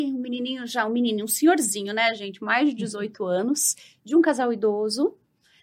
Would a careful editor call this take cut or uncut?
uncut